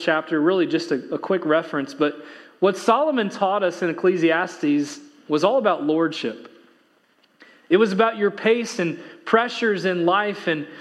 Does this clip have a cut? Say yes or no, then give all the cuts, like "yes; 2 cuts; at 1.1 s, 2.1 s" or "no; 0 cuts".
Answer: no; 0 cuts